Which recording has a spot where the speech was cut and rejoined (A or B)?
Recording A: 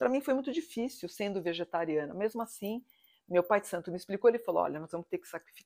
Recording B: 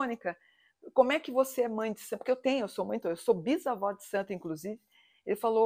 B